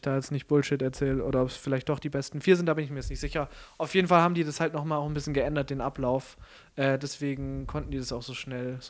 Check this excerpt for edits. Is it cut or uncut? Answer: uncut